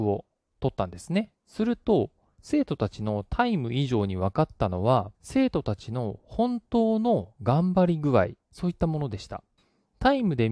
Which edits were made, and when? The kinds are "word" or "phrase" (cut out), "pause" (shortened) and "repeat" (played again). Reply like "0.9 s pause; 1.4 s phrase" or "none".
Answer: 1.4 s pause; 5.1 s pause; 8.4 s pause; 9.6 s pause